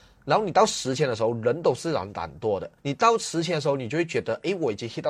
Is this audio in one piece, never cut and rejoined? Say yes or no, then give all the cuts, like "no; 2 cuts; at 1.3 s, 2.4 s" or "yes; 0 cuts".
no; 1 cut; at 2.8 s